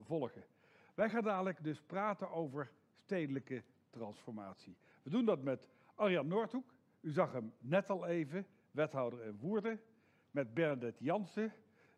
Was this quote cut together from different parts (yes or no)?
no